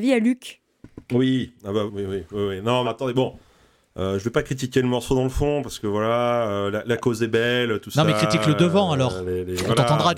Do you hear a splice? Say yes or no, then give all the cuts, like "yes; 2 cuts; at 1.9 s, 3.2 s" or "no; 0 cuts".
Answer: yes; 2 cuts; at 1.9 s, 2.8 s